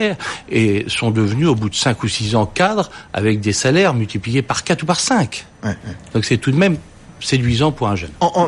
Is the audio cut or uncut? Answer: uncut